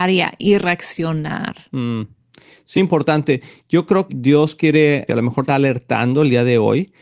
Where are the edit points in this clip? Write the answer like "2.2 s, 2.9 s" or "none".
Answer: 2.8 s, 4.1 s, 5.1 s, 5.5 s